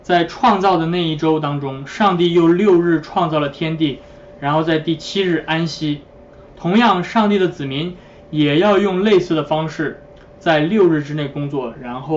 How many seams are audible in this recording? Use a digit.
0